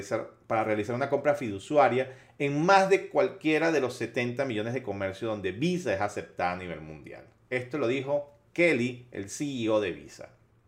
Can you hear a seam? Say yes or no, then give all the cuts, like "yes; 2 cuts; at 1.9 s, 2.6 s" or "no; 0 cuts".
no; 0 cuts